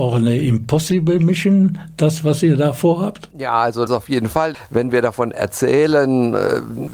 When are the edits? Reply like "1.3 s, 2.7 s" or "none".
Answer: 3.9 s